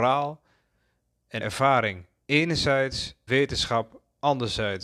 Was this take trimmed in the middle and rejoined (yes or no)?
yes